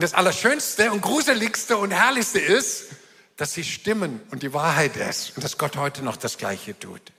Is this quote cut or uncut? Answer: uncut